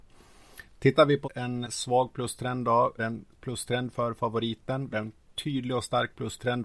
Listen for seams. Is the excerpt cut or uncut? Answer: cut